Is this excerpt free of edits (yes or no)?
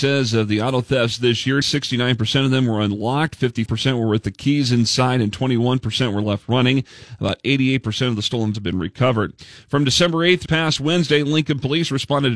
no